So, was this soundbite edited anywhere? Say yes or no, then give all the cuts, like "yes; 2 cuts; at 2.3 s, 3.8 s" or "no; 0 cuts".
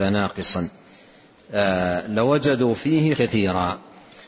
yes; 1 cut; at 3.1 s